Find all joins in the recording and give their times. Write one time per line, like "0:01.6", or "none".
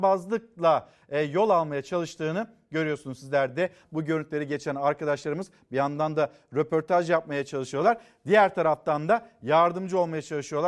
0:03.8